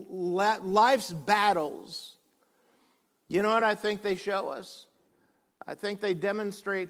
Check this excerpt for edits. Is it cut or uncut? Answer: uncut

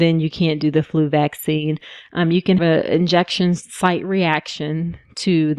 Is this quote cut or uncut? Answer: cut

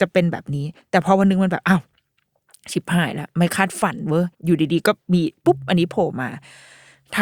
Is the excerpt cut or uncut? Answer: cut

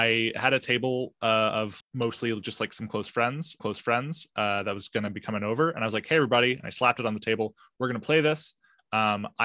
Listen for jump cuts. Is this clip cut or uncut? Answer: cut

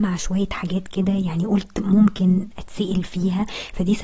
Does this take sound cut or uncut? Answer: uncut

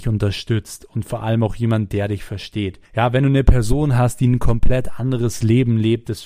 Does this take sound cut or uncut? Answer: cut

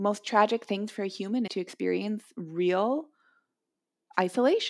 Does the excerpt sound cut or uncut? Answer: cut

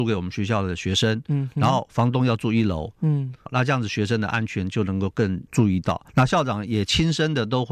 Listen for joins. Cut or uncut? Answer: cut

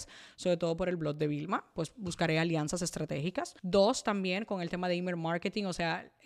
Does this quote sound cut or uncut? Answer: cut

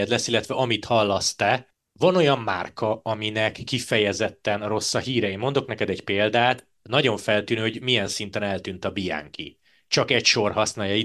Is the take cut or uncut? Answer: uncut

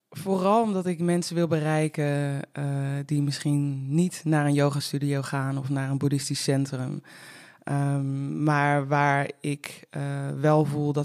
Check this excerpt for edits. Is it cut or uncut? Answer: uncut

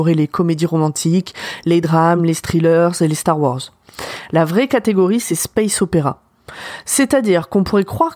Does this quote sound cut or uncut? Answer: uncut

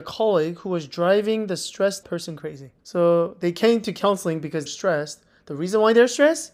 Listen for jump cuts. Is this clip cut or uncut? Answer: cut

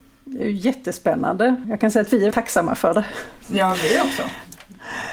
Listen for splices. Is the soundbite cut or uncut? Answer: cut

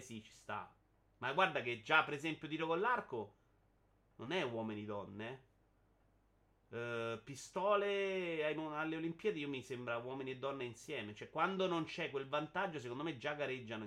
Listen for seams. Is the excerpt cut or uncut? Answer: uncut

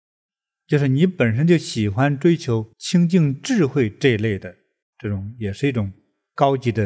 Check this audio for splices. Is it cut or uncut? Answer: cut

